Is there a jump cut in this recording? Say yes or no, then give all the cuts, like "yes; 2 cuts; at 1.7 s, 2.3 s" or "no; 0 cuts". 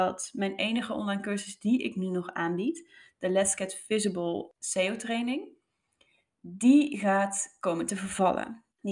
no; 0 cuts